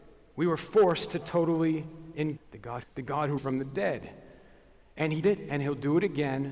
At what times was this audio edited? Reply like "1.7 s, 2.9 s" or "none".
1.2 s, 2.4 s, 2.8 s, 3.4 s, 5.2 s